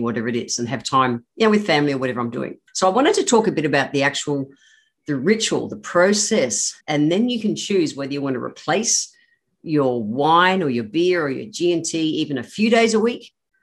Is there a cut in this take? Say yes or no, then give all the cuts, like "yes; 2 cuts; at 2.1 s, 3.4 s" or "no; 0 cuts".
yes; 2 cuts; at 2.7 s, 6.8 s